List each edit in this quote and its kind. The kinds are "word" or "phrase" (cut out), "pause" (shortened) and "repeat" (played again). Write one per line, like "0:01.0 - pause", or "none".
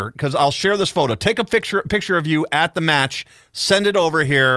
none